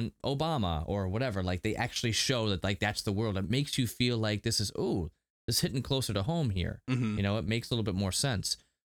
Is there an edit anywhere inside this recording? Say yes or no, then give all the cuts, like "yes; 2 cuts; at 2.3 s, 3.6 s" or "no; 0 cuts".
no; 0 cuts